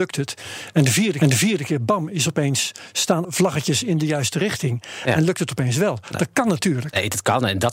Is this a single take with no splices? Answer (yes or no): no